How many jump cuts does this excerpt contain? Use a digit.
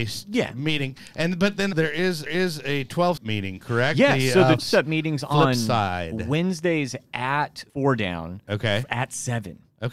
5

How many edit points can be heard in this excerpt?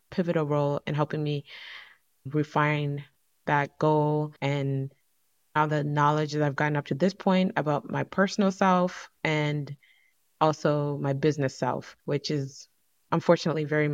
2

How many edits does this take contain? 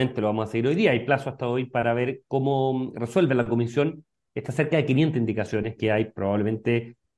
1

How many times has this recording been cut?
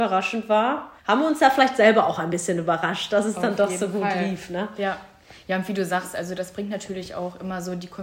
1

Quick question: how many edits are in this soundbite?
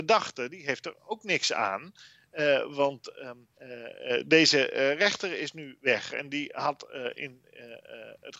1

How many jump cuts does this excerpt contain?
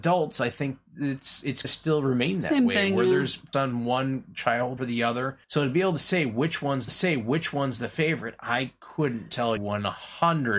6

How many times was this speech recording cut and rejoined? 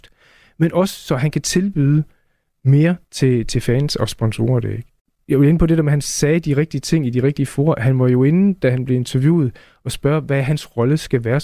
1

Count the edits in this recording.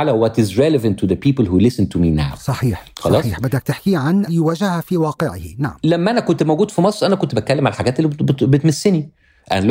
1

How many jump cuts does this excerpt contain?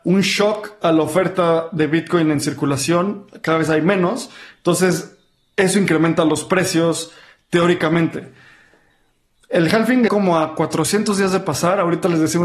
1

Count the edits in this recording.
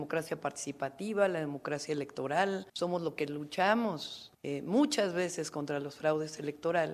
2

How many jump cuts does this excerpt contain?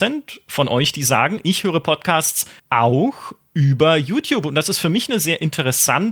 1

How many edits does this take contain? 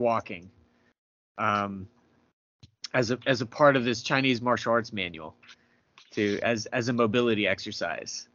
0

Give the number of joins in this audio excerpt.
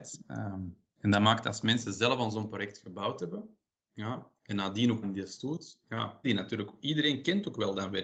2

